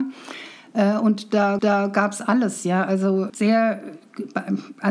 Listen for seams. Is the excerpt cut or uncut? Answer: cut